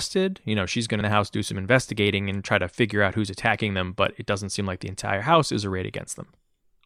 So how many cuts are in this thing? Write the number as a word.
one